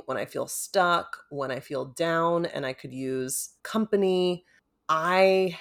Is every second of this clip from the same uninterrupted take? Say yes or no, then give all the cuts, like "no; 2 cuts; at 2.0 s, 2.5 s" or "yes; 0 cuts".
no; 1 cut; at 3.6 s